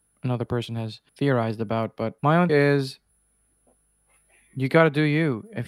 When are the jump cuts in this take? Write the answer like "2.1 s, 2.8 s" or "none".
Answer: 1.1 s, 2.2 s, 2.5 s